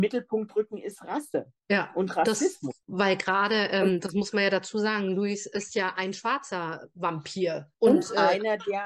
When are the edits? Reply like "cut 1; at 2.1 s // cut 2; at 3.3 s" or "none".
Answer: cut 1; at 1.6 s